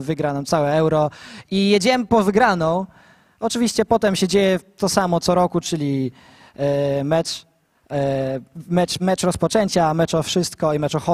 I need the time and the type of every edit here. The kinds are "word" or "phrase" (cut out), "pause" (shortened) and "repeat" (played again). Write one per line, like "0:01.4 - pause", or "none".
0:09.0 - word